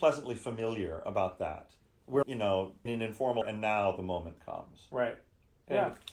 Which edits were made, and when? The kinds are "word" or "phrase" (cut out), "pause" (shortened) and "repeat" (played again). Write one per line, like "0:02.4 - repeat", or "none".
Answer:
0:02.2 - word
0:02.9 - word
0:03.4 - word

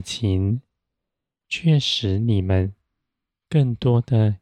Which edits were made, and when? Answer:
none

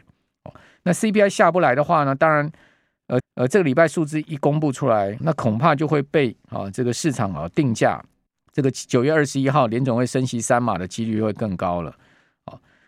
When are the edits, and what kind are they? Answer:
0:03.2 - repeat
0:05.2 - word
0:08.3 - pause

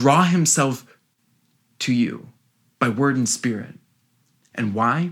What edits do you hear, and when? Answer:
none

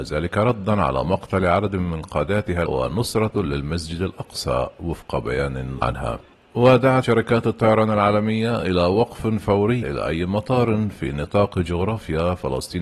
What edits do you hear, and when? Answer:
0:02.6 - word
0:05.8 - word
0:07.0 - word
0:09.8 - word

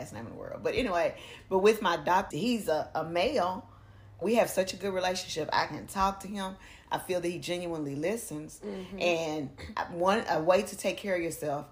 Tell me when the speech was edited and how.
0:02.3 - word
0:04.2 - phrase

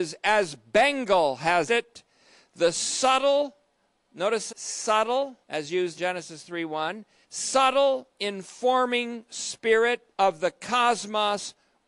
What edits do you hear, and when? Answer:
0:01.7 - word
0:04.5 - phrase
0:05.4 - pause
0:06.0 - word
0:07.2 - pause
0:10.1 - pause

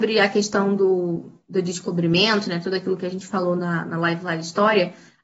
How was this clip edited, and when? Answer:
none

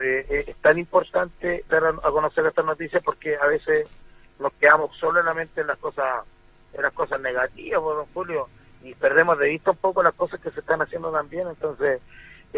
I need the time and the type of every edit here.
none

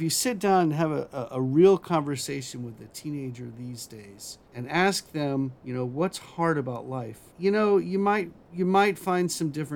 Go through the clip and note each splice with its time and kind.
0:04.4 - pause
0:05.6 - pause
0:07.3 - pause
0:08.4 - pause

